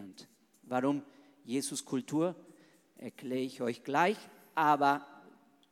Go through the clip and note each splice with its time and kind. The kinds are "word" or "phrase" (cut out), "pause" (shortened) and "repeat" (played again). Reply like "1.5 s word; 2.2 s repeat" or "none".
none